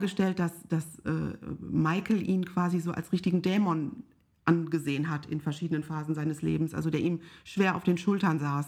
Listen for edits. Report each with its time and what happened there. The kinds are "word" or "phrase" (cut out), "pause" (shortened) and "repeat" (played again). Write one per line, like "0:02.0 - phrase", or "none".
none